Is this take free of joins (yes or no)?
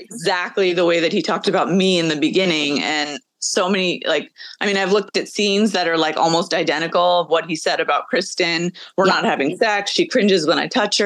yes